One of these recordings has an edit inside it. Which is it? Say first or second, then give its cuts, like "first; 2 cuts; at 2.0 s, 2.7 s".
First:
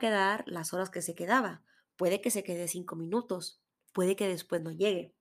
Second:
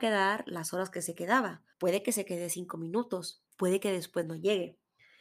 second; 2 cuts; at 1.7 s, 3.5 s